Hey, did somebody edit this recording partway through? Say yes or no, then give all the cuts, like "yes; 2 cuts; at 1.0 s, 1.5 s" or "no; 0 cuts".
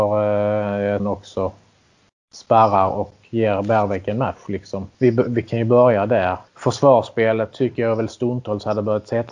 yes; 4 cuts; at 1.0 s, 3.2 s, 4.9 s, 6.5 s